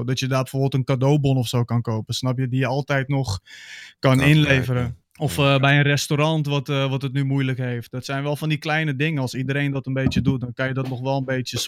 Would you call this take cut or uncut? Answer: cut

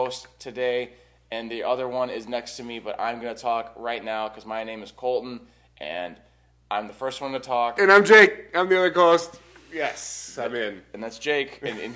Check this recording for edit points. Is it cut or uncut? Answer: uncut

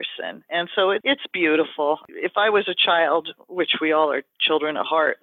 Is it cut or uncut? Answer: uncut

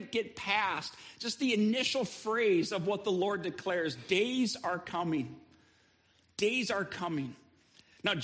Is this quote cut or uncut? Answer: uncut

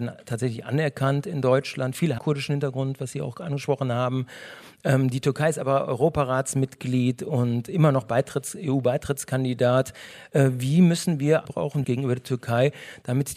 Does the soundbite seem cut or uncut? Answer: cut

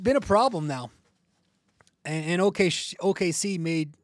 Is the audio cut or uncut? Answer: uncut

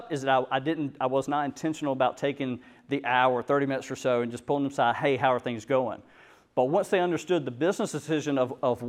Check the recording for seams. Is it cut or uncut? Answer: uncut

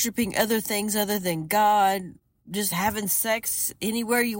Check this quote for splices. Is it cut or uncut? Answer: uncut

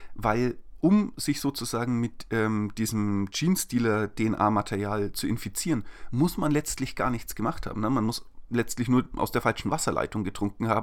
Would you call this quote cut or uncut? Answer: uncut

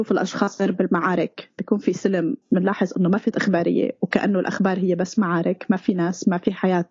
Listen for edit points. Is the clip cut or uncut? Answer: cut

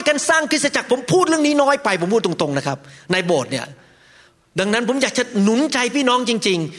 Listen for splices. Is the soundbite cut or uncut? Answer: uncut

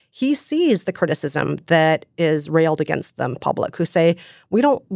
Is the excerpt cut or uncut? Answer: cut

